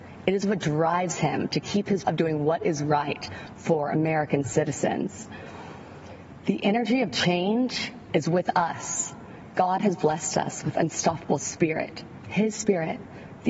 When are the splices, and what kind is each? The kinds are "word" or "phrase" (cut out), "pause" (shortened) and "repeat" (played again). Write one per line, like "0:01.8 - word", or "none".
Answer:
0:02.0 - word
0:08.1 - phrase